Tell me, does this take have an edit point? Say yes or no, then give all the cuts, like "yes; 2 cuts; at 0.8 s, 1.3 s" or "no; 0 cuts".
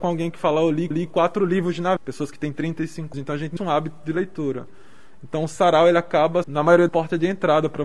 yes; 6 cuts; at 0.9 s, 2.0 s, 3.1 s, 3.6 s, 6.4 s, 6.9 s